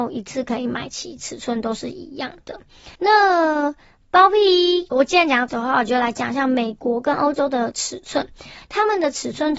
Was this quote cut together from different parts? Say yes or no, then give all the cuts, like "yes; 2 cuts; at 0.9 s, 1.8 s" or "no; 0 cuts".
yes; 3 cuts; at 2.9 s, 4.9 s, 5.5 s